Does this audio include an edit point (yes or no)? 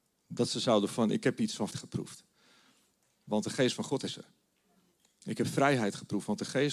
yes